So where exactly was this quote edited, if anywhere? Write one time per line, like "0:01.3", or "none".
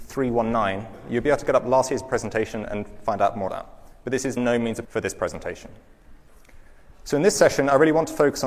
0:03.5
0:04.4
0:04.8